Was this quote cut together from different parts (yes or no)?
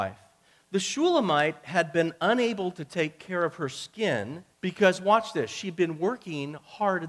yes